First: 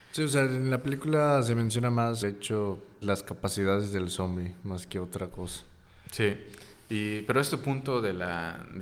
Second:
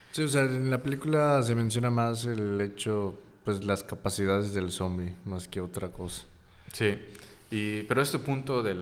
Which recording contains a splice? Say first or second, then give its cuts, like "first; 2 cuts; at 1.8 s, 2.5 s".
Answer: first; 2 cuts; at 2.2 s, 3.0 s